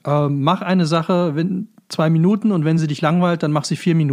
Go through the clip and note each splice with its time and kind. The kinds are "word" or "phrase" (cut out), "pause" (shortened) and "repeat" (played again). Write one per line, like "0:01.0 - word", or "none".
none